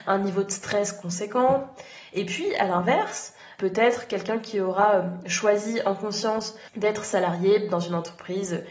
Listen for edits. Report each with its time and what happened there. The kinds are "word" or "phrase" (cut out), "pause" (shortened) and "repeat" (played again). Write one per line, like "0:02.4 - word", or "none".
none